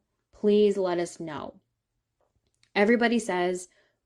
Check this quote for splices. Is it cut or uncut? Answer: uncut